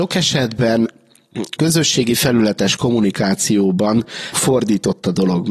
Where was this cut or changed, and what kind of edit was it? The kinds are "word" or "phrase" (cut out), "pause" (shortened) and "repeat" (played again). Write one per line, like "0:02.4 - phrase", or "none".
0:01.6 - word
0:04.3 - word